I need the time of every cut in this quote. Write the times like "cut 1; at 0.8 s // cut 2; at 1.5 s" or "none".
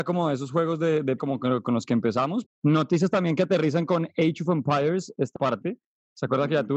cut 1; at 1.2 s // cut 2; at 2.5 s // cut 3; at 5.4 s